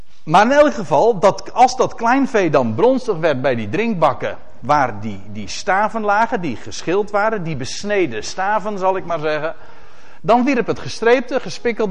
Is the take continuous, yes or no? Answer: yes